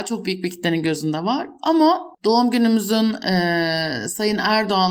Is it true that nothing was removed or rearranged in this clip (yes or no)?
no